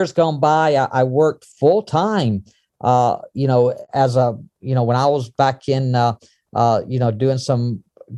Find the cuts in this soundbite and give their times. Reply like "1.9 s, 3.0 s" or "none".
none